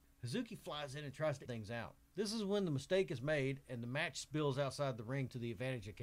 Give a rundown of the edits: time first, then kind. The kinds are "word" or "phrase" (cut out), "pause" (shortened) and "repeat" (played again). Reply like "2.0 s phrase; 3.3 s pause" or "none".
1.5 s word